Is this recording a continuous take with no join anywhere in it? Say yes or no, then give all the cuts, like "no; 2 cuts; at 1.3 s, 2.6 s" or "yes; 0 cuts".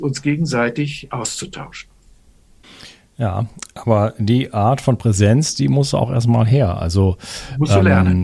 yes; 0 cuts